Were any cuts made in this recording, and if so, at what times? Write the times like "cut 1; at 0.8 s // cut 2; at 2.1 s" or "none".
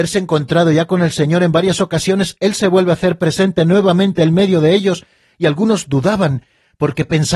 none